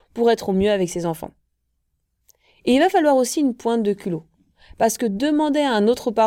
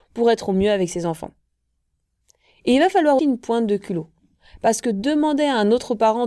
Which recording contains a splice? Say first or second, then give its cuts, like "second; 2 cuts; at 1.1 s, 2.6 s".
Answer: second; 1 cut; at 3.2 s